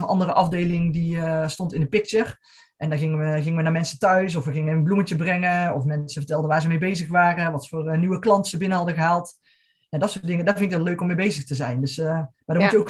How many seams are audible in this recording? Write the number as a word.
zero